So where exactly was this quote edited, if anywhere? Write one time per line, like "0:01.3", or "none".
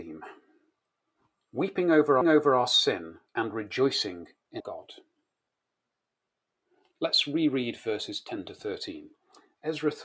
0:02.2
0:03.3
0:04.6